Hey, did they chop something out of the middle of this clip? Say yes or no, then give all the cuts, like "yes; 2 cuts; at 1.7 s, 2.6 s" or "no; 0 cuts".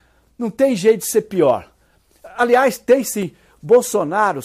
no; 0 cuts